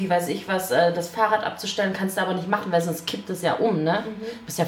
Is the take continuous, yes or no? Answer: yes